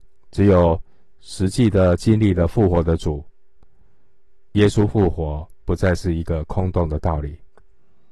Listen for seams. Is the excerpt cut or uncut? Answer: cut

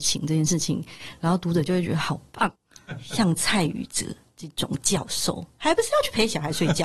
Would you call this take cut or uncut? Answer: cut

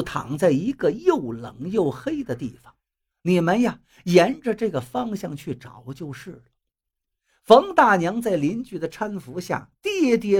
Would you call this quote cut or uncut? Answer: uncut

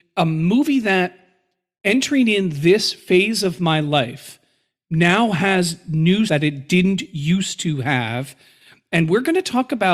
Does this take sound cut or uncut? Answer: cut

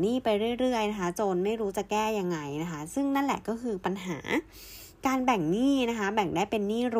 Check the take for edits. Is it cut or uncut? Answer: uncut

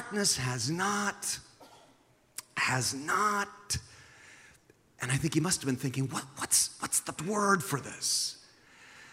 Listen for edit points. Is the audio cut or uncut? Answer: cut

